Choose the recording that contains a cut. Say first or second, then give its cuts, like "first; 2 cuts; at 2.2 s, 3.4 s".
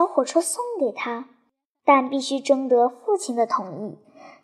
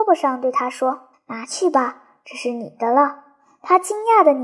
second; 1 cut; at 1.1 s